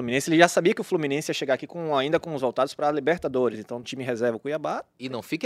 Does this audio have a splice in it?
yes; 2 cuts; at 2.4 s, 3.8 s

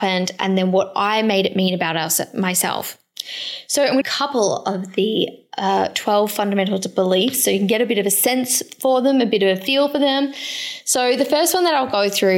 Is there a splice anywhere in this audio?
yes; 1 cut; at 4.0 s

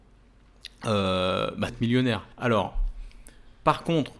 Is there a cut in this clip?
yes; 2 cuts; at 1.7 s, 2.3 s

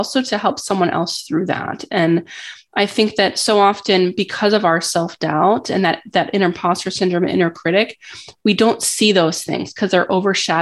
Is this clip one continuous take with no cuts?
yes; 0 cuts

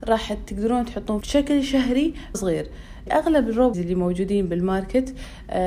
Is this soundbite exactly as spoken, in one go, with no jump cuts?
no; 4 cuts; at 1.2 s, 2.3 s, 3.1 s, 3.7 s

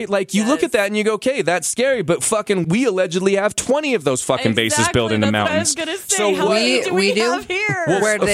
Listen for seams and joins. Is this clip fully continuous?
no; 1 cut; at 2.6 s

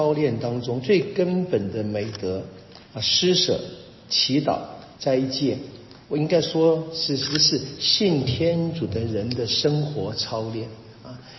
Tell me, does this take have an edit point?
yes; 3 cuts; at 2.8 s, 4.9 s, 6.0 s

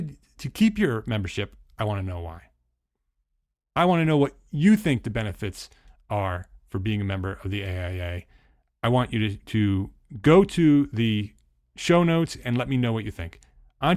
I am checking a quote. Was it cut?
yes; 1 cut; at 9.4 s

